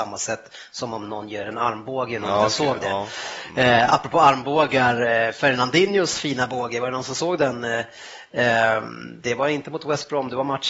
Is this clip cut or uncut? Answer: uncut